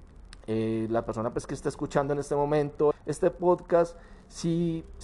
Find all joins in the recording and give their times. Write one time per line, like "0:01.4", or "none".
0:02.9